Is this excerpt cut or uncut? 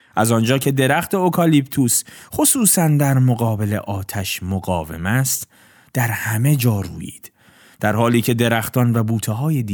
uncut